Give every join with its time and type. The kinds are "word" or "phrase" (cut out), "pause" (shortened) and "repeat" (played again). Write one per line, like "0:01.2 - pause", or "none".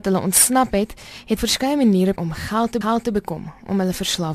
0:01.4 - word
0:02.2 - word
0:02.8 - repeat